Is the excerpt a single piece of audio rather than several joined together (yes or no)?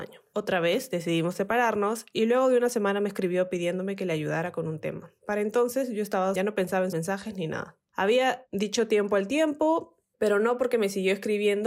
no